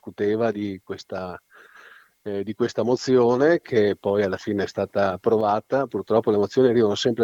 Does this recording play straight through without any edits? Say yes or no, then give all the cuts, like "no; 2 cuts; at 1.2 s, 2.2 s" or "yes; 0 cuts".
yes; 0 cuts